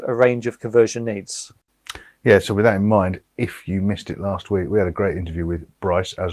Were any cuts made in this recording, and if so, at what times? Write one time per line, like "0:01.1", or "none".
none